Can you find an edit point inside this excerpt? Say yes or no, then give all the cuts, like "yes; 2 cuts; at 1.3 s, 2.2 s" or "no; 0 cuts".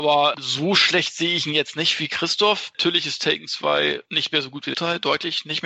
yes; 1 cut; at 4.7 s